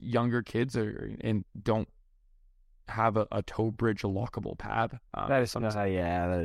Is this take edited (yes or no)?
yes